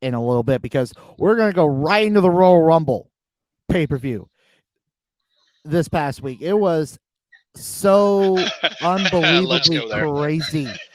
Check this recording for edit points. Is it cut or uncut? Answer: uncut